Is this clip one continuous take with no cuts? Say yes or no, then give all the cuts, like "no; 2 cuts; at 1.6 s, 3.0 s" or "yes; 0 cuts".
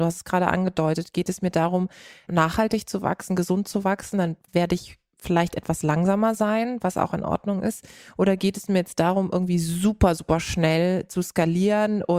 yes; 0 cuts